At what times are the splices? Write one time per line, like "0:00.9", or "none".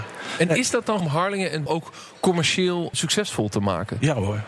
0:01.0
0:01.7
0:02.9